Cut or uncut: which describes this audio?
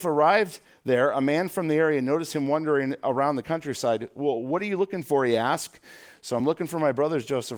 uncut